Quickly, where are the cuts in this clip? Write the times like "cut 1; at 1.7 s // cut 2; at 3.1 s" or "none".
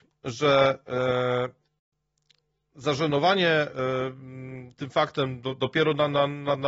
none